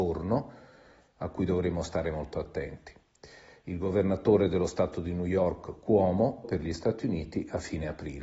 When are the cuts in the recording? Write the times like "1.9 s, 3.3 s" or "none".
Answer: 6.4 s